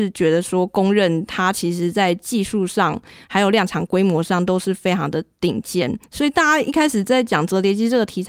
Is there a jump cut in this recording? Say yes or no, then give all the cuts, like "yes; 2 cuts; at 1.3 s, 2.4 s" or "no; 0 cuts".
yes; 1 cut; at 6.1 s